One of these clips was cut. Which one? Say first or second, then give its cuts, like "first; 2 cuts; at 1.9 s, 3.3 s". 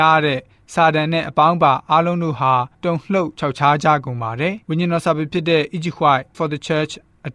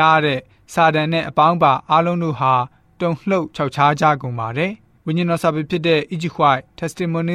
first; 3 cuts; at 2.7 s, 4.6 s, 6.3 s